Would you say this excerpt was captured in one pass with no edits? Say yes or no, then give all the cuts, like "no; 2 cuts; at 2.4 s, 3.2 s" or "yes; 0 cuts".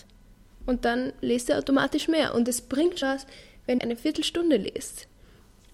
no; 2 cuts; at 3.0 s, 3.8 s